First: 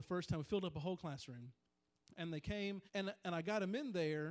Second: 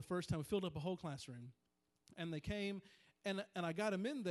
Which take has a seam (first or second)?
first